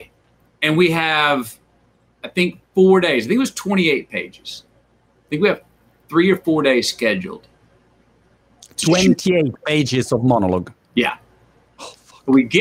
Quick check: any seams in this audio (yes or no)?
no